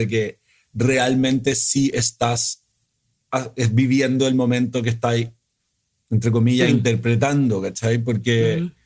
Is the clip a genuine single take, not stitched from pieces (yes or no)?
yes